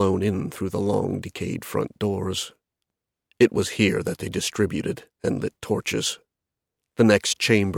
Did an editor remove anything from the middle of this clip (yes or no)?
no